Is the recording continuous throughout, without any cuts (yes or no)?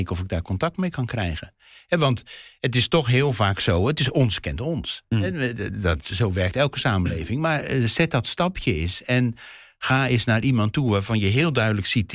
yes